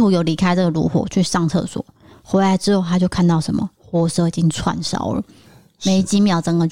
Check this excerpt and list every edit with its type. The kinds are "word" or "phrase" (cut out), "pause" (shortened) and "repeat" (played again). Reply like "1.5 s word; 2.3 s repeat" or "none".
none